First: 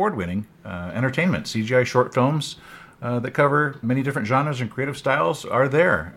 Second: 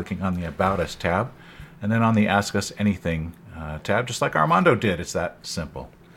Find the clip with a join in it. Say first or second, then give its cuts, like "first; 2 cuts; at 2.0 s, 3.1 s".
first; 1 cut; at 3.8 s